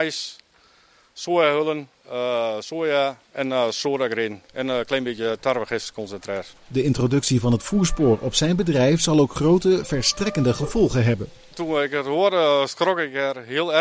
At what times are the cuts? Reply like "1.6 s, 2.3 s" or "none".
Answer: 1.9 s, 3.2 s, 4.5 s, 6.6 s